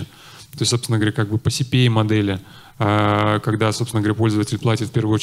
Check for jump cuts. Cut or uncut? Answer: uncut